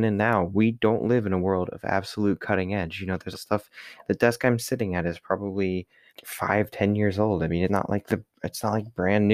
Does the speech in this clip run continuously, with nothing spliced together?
no; 3 cuts; at 3.3 s, 6.1 s, 7.7 s

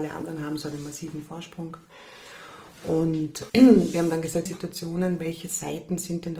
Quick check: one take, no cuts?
no; 2 cuts; at 3.5 s, 4.5 s

